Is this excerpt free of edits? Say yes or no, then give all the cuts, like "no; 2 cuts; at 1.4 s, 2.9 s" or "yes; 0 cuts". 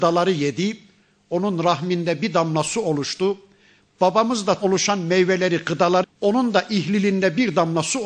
no; 2 cuts; at 4.6 s, 6.0 s